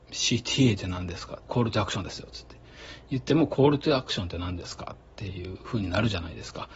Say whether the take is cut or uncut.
cut